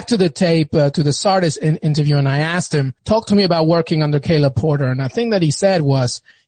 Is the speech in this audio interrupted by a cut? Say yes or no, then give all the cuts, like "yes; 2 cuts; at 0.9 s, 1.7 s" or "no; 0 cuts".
yes; 1 cut; at 3.0 s